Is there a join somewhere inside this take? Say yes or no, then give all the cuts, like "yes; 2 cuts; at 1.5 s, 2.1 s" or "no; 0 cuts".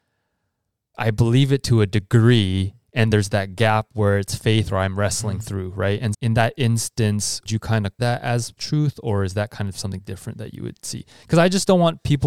yes; 6 cuts; at 0.9 s, 3.1 s, 6.1 s, 7.5 s, 8.0 s, 8.6 s